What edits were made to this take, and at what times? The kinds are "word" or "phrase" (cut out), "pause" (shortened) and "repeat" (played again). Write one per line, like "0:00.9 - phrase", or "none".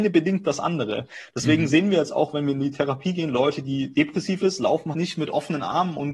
0:04.9 - word

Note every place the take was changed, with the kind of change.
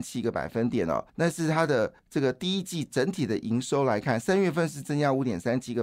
0:01.1 - pause
0:02.0 - pause

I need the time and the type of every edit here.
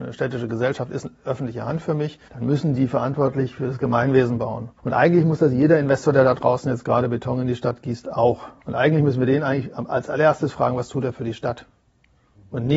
0:02.3 - pause
0:04.8 - pause
0:08.6 - pause

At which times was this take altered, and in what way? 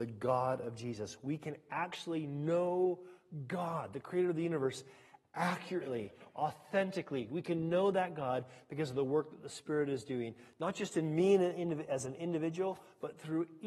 none

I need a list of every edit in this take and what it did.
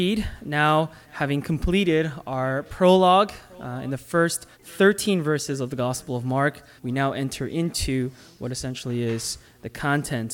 0:01.0 - pause
0:04.5 - pause
0:06.8 - pause

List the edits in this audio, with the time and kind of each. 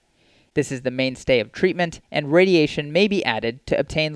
0:02.0 - pause

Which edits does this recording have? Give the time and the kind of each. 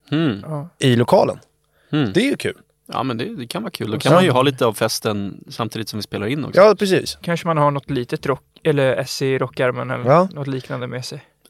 none

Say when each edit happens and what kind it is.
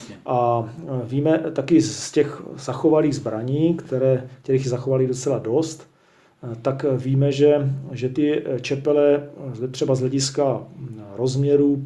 none

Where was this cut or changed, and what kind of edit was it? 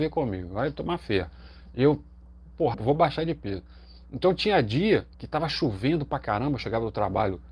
0:02.7 - word
0:05.1 - pause

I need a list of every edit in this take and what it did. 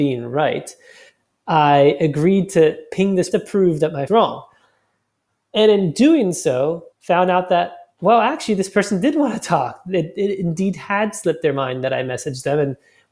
0:03.3 - phrase
0:04.1 - phrase
0:06.9 - pause

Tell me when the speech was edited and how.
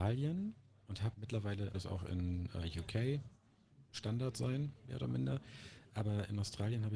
0:01.1 - phrase
0:01.7 - phrase
0:03.9 - pause

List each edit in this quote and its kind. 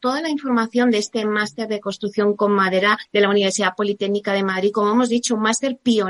0:03.0 - pause

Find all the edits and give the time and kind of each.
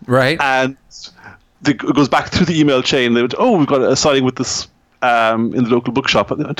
none

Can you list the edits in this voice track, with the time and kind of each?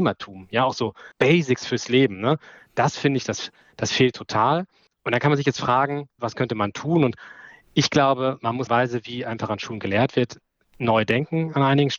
0:01.1 - pause
0:06.2 - word
0:08.7 - phrase

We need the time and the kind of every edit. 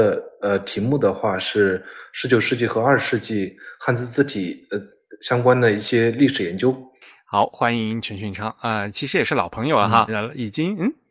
0:10.1 - word

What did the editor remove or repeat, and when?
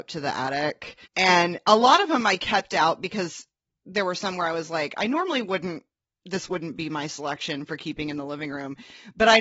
0:01.1 - pause

